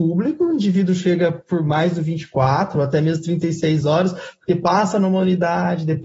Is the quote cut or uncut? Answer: uncut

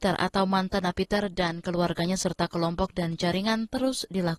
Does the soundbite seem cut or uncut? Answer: uncut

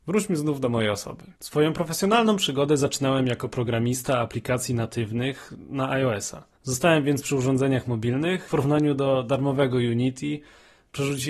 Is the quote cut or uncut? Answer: cut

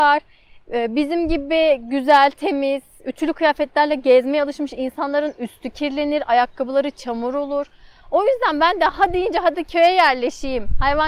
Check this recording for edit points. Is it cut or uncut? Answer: uncut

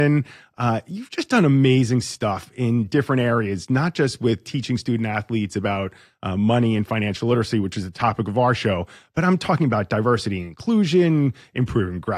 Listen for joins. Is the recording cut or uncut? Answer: uncut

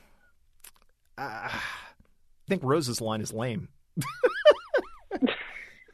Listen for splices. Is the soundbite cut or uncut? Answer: cut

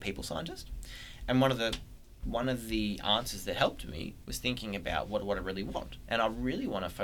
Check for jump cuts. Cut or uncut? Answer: uncut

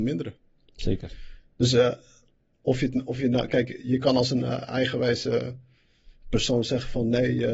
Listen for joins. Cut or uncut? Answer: uncut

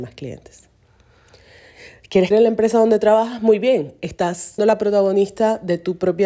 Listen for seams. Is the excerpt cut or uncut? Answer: cut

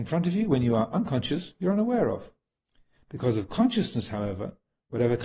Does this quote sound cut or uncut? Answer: uncut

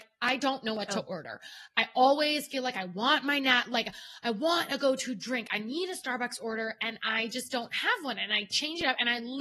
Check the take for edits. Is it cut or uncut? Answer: uncut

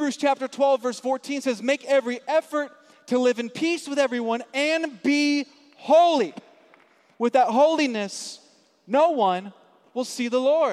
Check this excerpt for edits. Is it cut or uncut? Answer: uncut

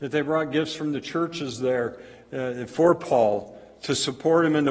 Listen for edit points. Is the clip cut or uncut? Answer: uncut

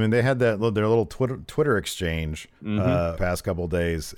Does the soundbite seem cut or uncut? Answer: cut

